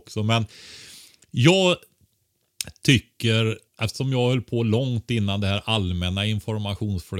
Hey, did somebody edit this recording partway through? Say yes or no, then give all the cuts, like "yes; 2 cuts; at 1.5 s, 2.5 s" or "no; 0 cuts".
yes; 1 cut; at 3.7 s